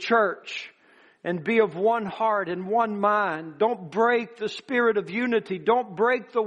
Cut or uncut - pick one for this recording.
uncut